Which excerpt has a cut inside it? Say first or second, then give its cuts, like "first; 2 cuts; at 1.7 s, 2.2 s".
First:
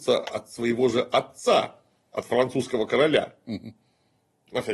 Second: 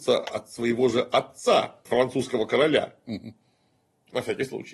second; 1 cut; at 1.9 s